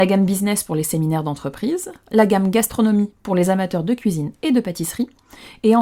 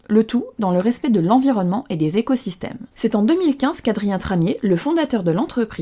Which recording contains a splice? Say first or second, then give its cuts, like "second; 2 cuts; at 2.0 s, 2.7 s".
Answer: second; 1 cut; at 2.9 s